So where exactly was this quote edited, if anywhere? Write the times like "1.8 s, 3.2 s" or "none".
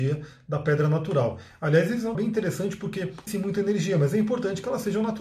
2.1 s, 3.3 s